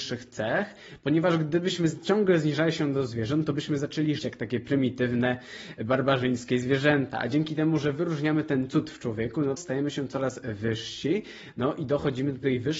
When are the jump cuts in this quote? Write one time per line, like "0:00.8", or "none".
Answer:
0:04.2
0:09.6